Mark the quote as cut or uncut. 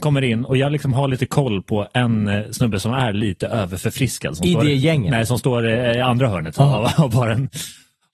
uncut